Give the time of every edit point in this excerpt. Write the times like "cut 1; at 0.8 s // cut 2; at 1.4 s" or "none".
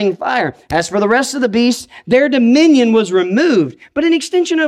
none